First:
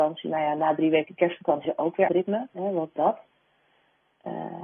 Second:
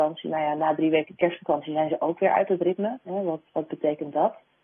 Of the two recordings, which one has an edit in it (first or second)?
first